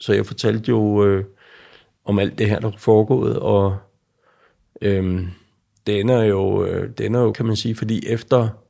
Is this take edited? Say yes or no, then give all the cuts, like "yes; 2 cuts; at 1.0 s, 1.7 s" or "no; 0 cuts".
yes; 1 cut; at 7.3 s